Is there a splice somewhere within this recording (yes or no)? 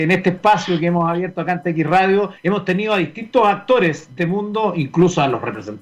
yes